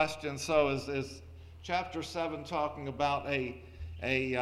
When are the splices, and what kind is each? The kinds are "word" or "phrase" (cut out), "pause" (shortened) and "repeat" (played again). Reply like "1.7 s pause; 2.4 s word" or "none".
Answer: none